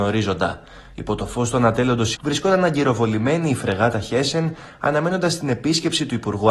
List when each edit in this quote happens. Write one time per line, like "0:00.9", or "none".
0:02.2